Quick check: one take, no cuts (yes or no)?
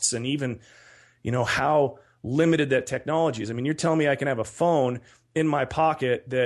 yes